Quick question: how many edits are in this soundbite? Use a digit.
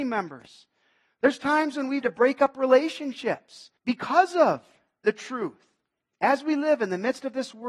2